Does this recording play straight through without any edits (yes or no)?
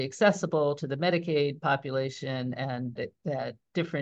no